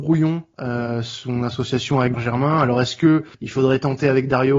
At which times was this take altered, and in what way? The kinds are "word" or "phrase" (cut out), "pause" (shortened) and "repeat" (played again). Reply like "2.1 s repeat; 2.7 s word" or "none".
2.1 s word; 3.3 s pause